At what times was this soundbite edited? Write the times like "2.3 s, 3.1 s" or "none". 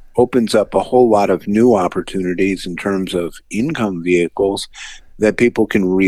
none